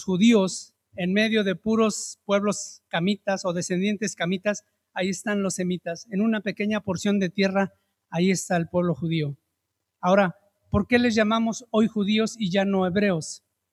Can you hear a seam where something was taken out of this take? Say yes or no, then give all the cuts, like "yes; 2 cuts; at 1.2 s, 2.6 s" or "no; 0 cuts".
no; 0 cuts